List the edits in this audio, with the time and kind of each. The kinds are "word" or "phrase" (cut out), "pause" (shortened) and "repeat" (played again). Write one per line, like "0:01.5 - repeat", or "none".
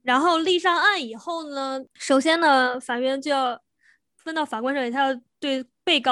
none